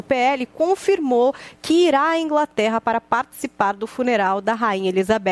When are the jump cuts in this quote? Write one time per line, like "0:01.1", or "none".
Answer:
none